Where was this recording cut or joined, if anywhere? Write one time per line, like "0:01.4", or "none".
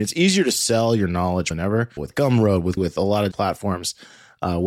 0:01.5
0:02.0
0:02.8
0:03.3